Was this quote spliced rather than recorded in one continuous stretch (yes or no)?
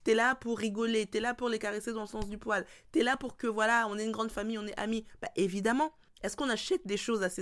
yes